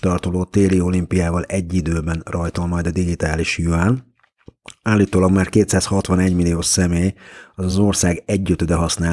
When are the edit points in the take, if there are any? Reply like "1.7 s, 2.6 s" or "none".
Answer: none